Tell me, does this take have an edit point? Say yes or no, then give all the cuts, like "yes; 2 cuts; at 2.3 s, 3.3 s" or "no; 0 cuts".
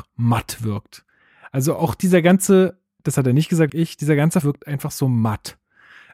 yes; 2 cuts; at 3.7 s, 4.4 s